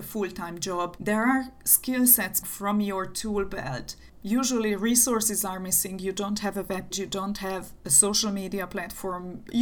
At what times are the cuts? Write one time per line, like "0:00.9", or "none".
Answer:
0:02.4
0:06.9

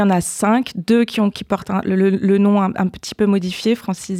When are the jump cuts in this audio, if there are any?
none

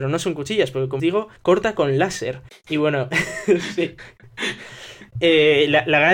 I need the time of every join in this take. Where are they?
0:01.0
0:01.4
0:02.5

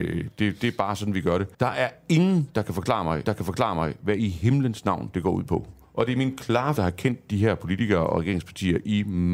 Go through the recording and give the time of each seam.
0:01.5
0:03.3
0:05.8
0:06.8

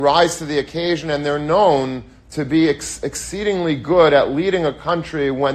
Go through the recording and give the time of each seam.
none

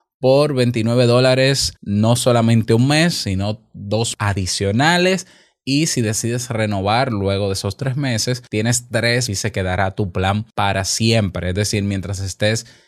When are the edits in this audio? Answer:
0:01.8
0:04.1
0:08.5
0:09.3
0:10.5

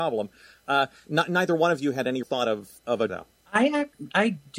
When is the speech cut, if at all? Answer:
0:02.2
0:02.8
0:03.1

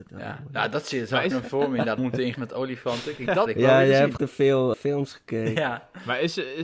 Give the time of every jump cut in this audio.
0:01.3
0:02.0
0:02.3
0:03.5
0:04.2
0:04.7

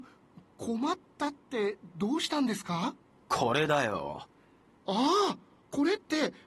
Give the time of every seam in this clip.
none

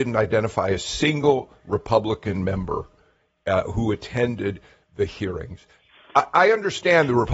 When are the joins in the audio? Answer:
none

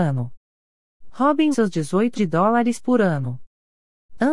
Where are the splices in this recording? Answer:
0:01.5
0:02.1

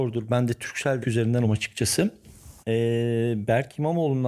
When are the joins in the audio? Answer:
0:01.0
0:01.4
0:02.6

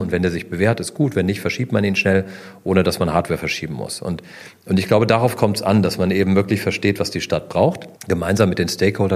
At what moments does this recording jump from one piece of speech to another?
0:08.0

